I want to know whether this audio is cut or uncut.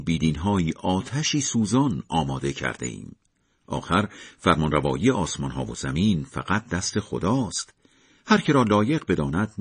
uncut